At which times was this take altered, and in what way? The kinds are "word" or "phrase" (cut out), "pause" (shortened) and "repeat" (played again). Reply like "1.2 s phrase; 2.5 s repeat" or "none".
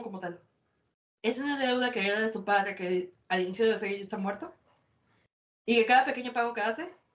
none